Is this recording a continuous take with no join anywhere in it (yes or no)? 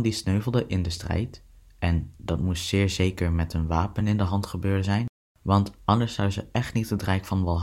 yes